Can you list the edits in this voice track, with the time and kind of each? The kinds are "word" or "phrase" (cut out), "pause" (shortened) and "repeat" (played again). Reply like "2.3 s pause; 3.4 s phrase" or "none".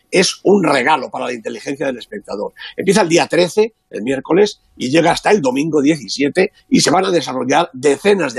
6.6 s pause